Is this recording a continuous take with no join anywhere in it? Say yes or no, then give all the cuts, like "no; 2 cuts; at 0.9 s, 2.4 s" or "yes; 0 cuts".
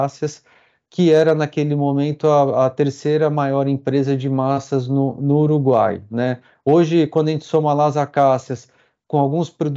yes; 0 cuts